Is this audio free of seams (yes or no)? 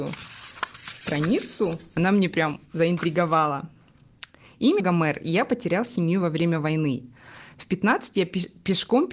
no